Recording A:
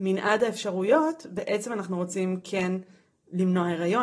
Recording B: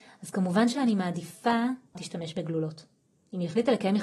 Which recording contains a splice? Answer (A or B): B